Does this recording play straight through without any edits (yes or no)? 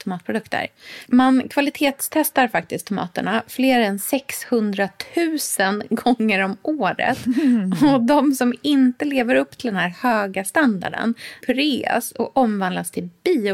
no